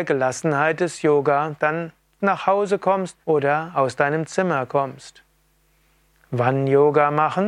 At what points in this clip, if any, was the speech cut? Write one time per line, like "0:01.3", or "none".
0:03.2